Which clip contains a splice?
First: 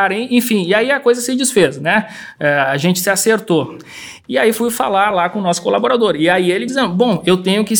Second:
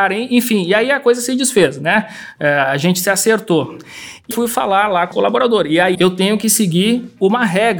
second; 3 cuts; at 4.3 s, 5.1 s, 5.9 s

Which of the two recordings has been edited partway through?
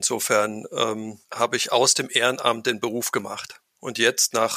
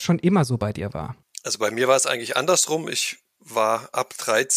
first; 1 cut; at 1.2 s

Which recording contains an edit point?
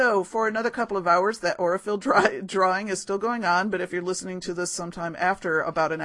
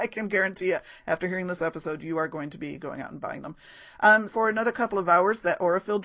second; 1 cut; at 4.3 s

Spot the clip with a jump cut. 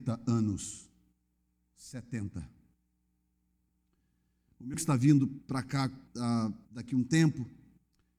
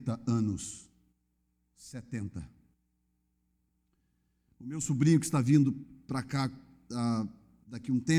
first; 4 cuts; at 4.7 s, 5.4 s, 6.1 s, 6.6 s

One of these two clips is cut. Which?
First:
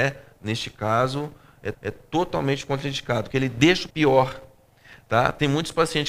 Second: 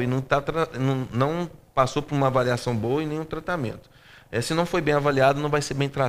first; 3 cuts; at 1.7 s, 3.3 s, 3.9 s

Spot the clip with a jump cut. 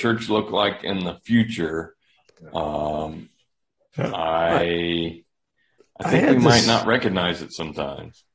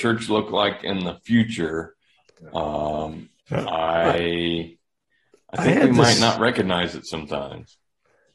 second; 1 cut; at 3.4 s

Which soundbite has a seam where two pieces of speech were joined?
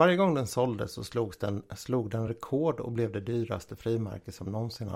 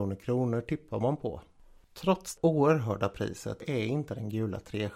second; 2 cuts; at 2.4 s, 3.6 s

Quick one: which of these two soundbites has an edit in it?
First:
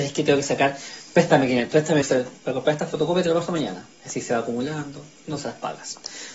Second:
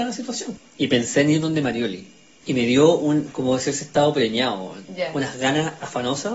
first; 1 cut; at 2.0 s

